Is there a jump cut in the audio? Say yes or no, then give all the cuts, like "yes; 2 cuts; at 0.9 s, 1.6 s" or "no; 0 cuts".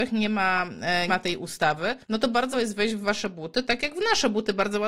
yes; 3 cuts; at 1.1 s, 2.0 s, 2.5 s